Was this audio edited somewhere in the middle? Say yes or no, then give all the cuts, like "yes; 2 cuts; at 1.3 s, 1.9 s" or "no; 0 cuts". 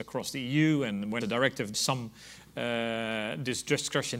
yes; 2 cuts; at 1.2 s, 1.7 s